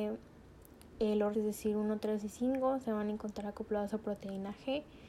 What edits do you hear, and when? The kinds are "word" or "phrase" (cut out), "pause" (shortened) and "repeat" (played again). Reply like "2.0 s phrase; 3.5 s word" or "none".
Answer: 1.3 s phrase